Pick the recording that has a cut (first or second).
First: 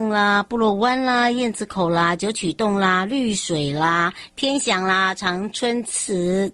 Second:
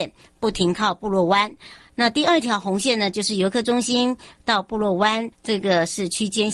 second